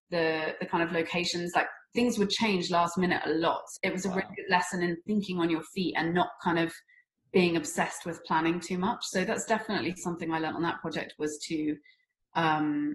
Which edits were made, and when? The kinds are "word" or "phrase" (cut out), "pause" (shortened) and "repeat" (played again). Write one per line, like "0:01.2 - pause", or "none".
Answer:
0:03.8 - word